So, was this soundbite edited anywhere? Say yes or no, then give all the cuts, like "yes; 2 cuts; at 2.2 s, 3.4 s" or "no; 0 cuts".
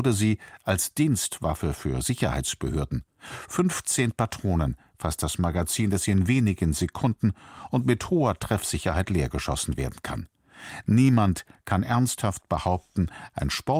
no; 0 cuts